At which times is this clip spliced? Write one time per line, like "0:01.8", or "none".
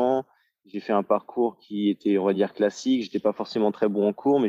none